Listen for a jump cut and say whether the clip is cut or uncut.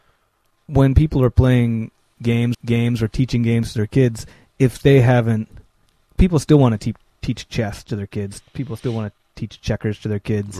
cut